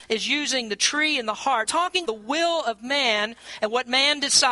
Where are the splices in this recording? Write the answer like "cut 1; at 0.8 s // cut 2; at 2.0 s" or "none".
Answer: cut 1; at 1.7 s // cut 2; at 2.0 s